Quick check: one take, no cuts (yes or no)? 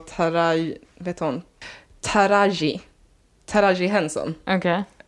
yes